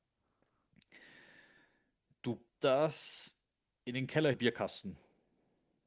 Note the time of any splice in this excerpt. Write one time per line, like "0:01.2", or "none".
0:02.5
0:04.3